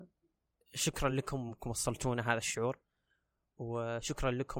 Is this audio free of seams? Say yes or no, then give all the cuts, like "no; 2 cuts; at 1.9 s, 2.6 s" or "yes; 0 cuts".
yes; 0 cuts